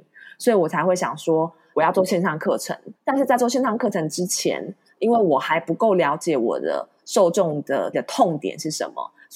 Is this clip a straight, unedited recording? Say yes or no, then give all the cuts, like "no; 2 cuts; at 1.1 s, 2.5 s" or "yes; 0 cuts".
no; 3 cuts; at 1.7 s, 3.0 s, 7.9 s